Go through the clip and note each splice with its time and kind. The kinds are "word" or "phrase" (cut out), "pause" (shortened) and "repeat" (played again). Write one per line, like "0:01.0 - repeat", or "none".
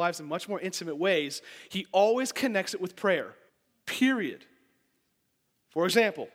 0:03.5 - pause